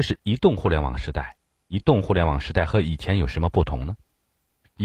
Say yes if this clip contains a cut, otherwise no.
no